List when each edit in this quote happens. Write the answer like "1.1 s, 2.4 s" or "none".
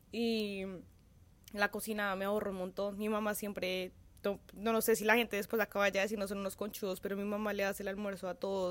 none